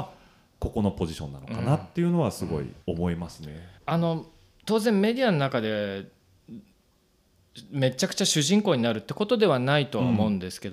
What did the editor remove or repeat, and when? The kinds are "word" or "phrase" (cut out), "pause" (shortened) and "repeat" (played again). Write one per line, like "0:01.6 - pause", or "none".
0:02.8 - pause
0:03.8 - pause